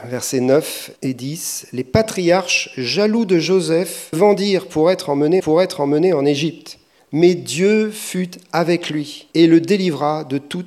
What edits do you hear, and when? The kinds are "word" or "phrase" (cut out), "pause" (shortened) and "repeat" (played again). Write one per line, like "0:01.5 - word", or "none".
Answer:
0:01.0 - pause
0:04.1 - word
0:05.4 - repeat
0:07.0 - pause
0:09.3 - pause